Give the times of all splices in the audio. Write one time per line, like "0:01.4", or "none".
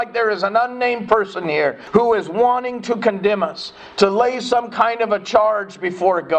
none